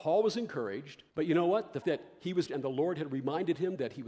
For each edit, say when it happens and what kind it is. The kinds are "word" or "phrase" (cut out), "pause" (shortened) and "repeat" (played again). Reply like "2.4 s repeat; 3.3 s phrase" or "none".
1.1 s pause; 1.8 s word; 2.5 s word